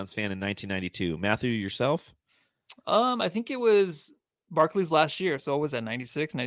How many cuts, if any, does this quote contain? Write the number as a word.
zero